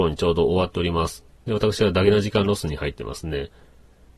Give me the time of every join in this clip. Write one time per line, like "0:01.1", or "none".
0:01.3